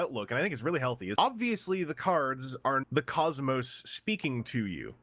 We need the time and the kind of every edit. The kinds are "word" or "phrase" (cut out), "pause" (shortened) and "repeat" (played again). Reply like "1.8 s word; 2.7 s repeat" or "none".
1.2 s word; 2.8 s word